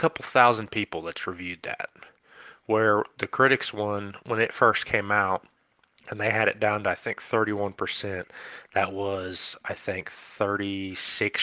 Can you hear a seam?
no; 0 cuts

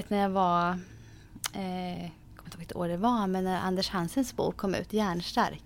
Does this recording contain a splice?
no; 0 cuts

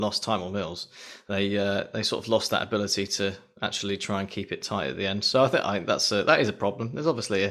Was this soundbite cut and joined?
no; 0 cuts

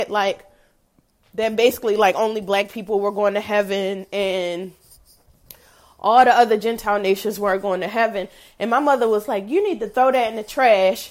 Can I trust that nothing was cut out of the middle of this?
yes; 0 cuts

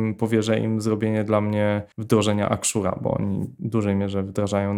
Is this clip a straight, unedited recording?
no; 1 cut; at 1.9 s

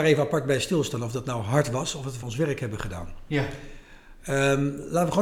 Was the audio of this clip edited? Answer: yes; 1 cut; at 2.2 s

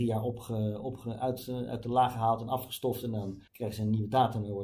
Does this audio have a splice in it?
yes; 1 cut; at 3.5 s

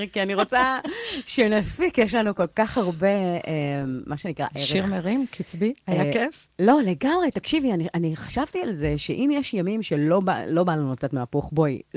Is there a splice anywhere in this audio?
no; 0 cuts

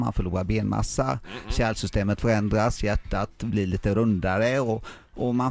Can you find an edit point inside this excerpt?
no; 0 cuts

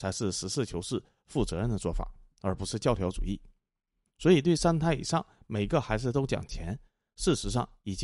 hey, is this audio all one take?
yes; 0 cuts

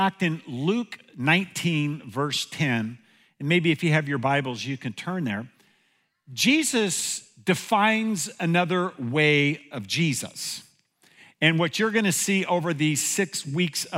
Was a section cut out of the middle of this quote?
no; 0 cuts

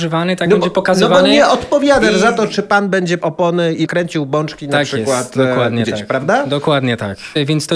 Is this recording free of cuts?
no; 1 cut; at 3.2 s

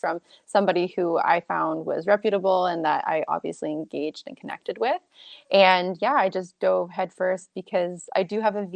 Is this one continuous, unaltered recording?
yes; 0 cuts

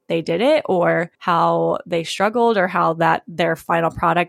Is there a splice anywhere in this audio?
yes; 1 cut; at 1.1 s

